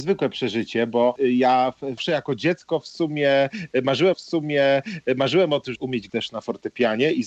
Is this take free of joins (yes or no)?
no